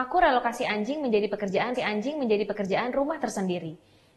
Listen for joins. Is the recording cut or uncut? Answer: cut